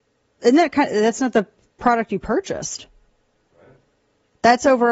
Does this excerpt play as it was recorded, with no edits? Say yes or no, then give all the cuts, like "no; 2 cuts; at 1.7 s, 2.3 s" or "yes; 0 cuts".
yes; 0 cuts